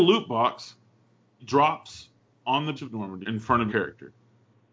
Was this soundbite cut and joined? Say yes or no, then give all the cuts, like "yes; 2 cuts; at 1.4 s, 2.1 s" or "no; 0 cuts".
yes; 4 cuts; at 1.4 s, 2.8 s, 3.2 s, 3.7 s